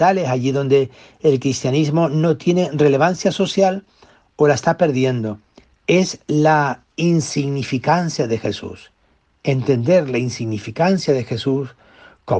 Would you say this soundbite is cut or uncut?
uncut